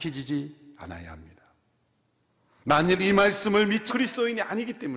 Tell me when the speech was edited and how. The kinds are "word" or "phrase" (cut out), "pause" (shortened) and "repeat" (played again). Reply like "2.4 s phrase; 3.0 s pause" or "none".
3.9 s word